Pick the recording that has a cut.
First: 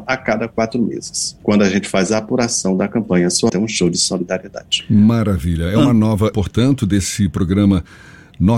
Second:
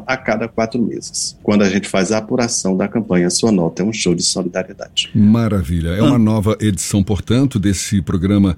first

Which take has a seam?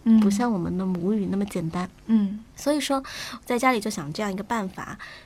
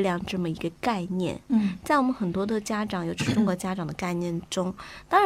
first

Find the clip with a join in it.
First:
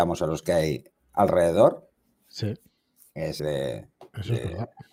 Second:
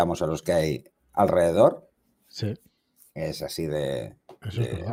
first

